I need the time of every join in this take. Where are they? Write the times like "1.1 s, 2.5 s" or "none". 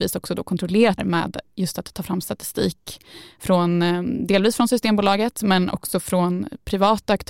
1.0 s